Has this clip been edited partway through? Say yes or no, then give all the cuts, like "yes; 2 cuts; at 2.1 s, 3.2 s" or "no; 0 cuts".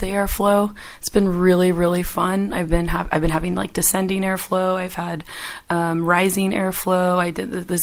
no; 0 cuts